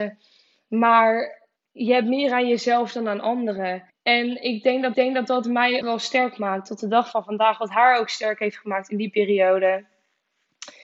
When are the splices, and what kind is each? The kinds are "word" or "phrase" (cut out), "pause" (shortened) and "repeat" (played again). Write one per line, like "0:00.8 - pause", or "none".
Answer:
0:01.6 - pause
0:03.9 - pause
0:04.9 - repeat
0:05.8 - word